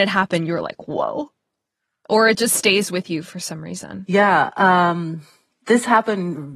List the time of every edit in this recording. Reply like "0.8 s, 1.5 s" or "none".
none